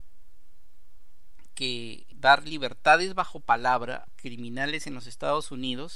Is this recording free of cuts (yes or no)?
no